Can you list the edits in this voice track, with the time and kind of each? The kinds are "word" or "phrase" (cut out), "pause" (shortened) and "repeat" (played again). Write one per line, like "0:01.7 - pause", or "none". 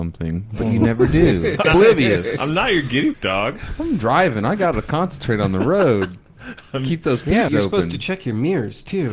0:01.6 - word
0:03.1 - word
0:07.5 - word